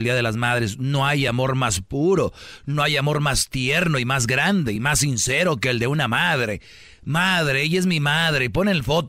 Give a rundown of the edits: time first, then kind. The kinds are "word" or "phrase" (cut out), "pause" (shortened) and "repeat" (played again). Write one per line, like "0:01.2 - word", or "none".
none